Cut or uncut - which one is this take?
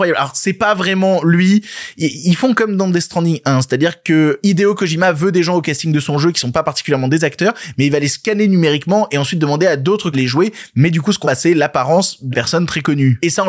cut